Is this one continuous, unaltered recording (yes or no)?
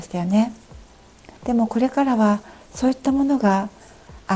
no